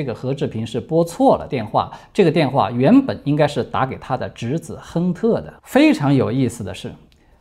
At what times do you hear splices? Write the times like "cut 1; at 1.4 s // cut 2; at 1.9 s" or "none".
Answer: cut 1; at 5.6 s